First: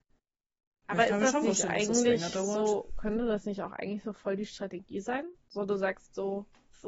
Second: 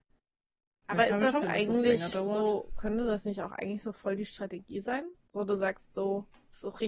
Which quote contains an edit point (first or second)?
second